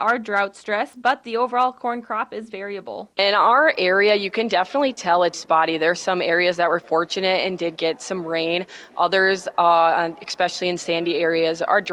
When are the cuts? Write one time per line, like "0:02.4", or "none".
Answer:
0:03.1
0:05.3